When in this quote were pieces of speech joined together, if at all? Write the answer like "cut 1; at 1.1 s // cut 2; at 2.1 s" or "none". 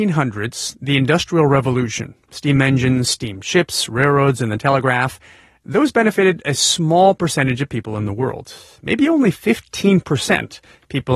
none